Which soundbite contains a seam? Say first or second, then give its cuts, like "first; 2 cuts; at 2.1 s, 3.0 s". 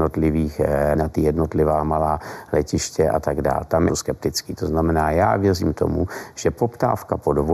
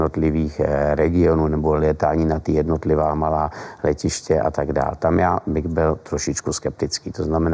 first; 2 cuts; at 0.9 s, 3.9 s